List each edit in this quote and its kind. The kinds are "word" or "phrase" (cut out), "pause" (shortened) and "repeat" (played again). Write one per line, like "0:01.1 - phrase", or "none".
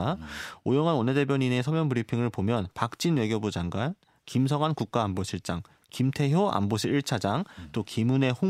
none